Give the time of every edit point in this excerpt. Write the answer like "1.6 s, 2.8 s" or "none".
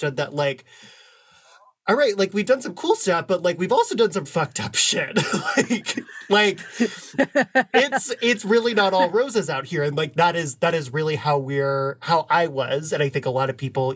4.2 s